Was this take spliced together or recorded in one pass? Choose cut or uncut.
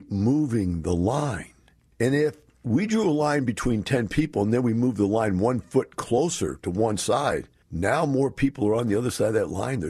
uncut